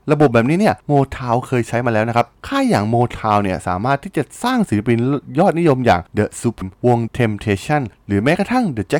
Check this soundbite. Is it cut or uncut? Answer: cut